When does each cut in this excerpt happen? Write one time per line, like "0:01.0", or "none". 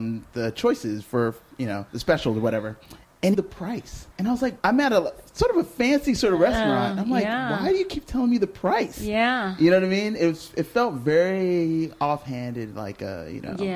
0:01.9
0:03.3
0:04.1
0:04.6